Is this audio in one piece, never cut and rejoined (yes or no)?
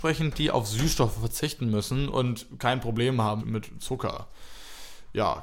no